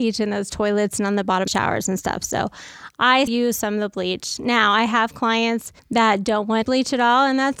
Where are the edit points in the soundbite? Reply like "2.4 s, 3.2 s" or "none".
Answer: 1.5 s, 3.3 s, 5.8 s, 6.6 s